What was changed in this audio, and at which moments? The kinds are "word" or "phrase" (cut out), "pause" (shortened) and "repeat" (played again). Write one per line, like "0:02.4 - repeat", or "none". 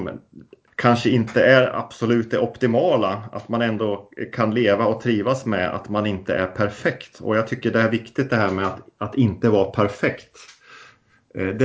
none